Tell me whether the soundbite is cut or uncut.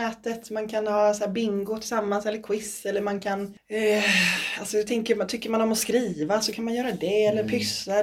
uncut